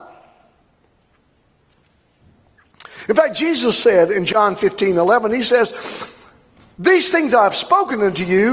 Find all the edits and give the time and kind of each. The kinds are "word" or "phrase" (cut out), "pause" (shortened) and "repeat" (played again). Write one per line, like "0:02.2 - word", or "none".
none